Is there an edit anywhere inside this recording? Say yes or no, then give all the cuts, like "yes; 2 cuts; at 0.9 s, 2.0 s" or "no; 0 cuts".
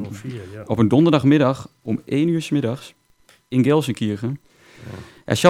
no; 0 cuts